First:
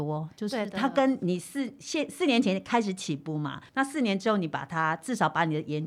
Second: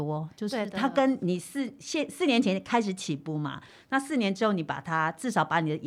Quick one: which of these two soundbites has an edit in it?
first; 1 cut; at 3.7 s

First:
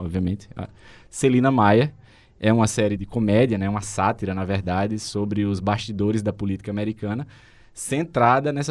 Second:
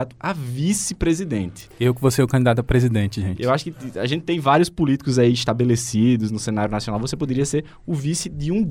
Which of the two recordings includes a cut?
first; 1 cut; at 3.0 s

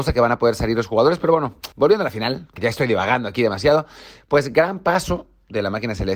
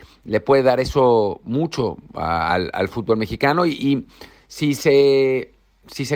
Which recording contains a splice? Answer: first; 2 cuts; at 1.7 s, 2.6 s

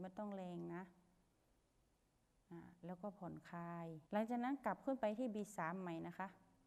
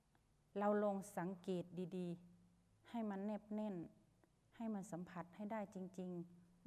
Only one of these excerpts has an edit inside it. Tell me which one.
first; 1 cut; at 4.1 s

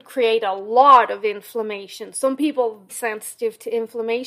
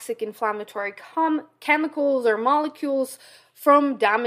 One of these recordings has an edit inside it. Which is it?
first; 1 cut; at 2.9 s

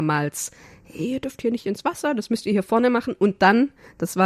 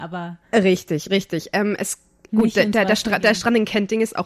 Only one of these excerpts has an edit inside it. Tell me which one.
second; 1 cut; at 2.3 s

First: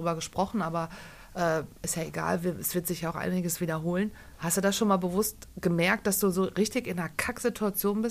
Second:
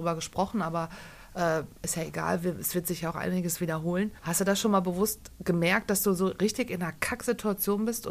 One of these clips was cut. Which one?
second; 1 cut; at 4.2 s

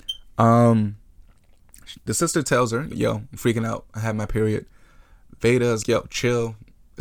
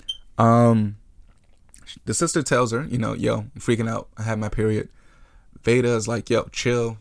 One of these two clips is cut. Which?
first; 2 cuts; at 2.9 s, 5.8 s

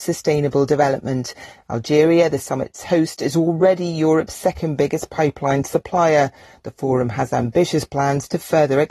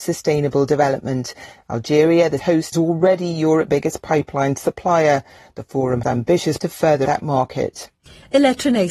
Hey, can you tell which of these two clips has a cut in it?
second; 6 cuts; at 2.4 s, 2.7 s, 3.7 s, 6.0 s, 6.6 s, 7.1 s

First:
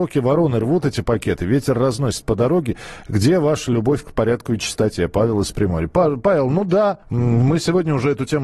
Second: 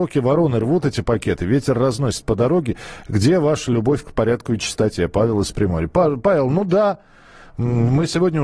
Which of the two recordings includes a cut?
first; 1 cut; at 7.0 s

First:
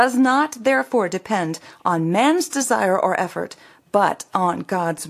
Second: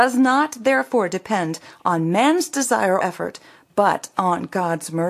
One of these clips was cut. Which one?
second; 1 cut; at 3.0 s

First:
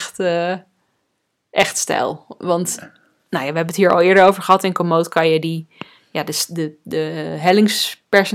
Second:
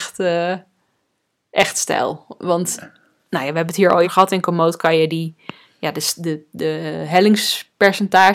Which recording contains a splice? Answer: second; 1 cut; at 4.0 s

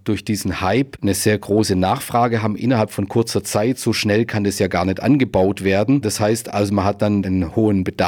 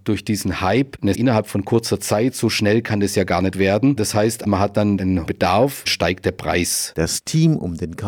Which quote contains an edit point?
second; 5 cuts; at 1.1 s, 3.5 s, 4.4 s, 5.3 s, 5.9 s

